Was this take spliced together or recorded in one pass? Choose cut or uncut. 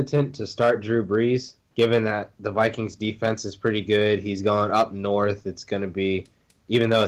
cut